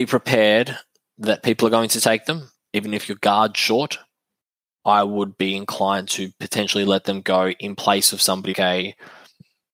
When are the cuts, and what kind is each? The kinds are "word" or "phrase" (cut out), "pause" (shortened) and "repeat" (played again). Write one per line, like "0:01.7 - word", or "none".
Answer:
0:08.5 - word